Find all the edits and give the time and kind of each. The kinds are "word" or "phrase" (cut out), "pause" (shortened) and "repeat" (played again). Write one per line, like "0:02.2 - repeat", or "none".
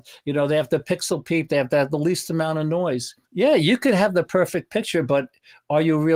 0:03.2 - pause